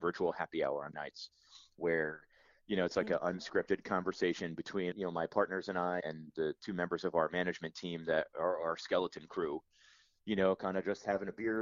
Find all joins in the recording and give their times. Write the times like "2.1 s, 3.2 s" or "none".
0.9 s, 4.9 s, 6.0 s

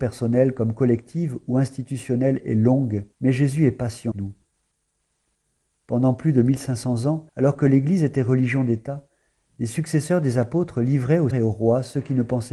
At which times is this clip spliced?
3.1 s, 4.1 s, 7.3 s, 11.3 s

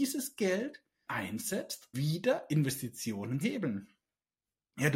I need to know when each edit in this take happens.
1.1 s, 1.9 s, 3.4 s

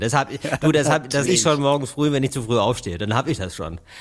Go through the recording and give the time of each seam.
1.3 s

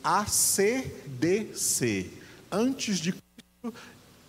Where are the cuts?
1.1 s

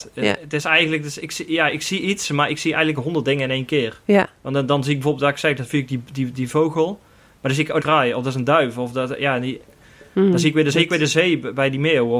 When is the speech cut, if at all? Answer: 7.8 s, 10.7 s

